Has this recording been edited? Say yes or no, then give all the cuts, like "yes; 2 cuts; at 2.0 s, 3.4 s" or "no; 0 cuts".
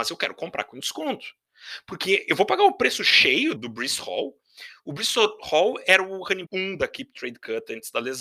yes; 2 cuts; at 3.6 s, 6.5 s